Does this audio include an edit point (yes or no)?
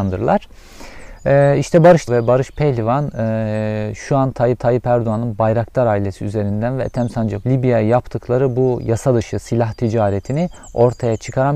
yes